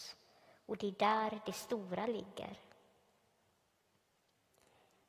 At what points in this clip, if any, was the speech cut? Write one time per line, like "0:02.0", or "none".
none